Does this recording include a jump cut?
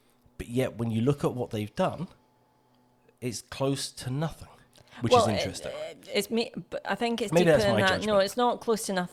no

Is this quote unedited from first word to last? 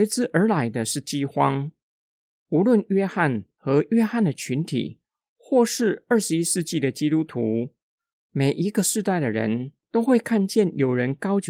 yes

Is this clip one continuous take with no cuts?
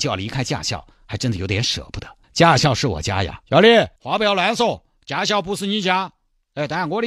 no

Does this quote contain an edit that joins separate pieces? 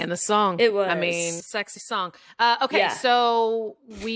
yes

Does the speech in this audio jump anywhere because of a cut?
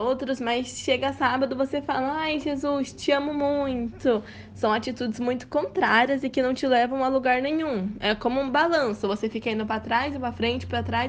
no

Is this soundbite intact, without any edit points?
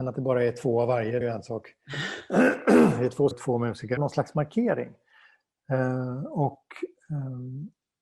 no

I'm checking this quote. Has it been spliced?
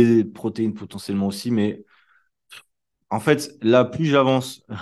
no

